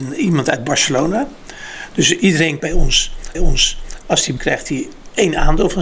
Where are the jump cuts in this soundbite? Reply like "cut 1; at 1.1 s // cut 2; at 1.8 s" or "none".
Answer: cut 1; at 2.6 s // cut 2; at 3.3 s // cut 3; at 4.4 s